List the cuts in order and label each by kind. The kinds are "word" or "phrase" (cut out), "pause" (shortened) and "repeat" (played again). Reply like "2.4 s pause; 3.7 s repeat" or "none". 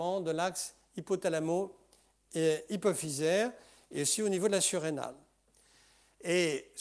none